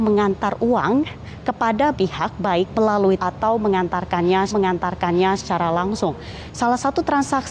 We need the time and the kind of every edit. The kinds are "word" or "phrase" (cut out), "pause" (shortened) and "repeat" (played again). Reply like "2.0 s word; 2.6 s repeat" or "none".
1.9 s word; 2.7 s word; 3.2 s word; 4.5 s repeat